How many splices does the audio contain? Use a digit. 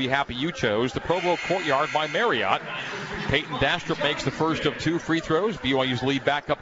0